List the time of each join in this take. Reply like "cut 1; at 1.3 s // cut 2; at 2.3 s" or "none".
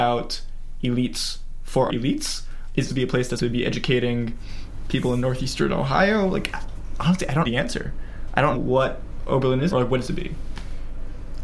cut 1; at 1.9 s // cut 2; at 2.9 s // cut 3; at 3.4 s // cut 4; at 6.5 s // cut 5; at 7.4 s // cut 6; at 8.5 s // cut 7; at 9.7 s // cut 8; at 10.0 s